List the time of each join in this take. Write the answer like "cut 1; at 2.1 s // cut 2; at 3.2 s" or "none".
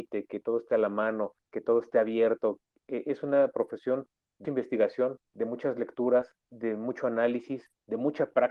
cut 1; at 1.4 s // cut 2; at 4.4 s // cut 3; at 5.3 s // cut 4; at 6.4 s